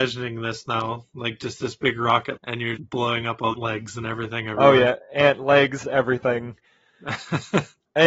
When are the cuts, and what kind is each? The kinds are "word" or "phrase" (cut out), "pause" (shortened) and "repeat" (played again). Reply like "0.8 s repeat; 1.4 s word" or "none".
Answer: 2.4 s word; 2.8 s word; 3.5 s phrase; 5.8 s word